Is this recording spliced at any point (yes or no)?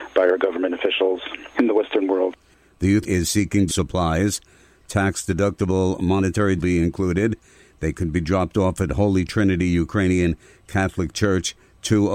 yes